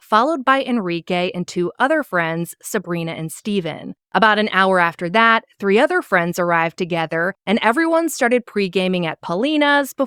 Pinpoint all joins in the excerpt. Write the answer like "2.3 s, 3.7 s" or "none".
none